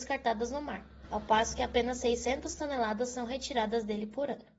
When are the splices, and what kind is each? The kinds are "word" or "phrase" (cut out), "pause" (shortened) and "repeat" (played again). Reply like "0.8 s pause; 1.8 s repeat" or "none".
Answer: 1.0 s pause